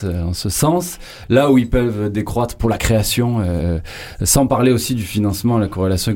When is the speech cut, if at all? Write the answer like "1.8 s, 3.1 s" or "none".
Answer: none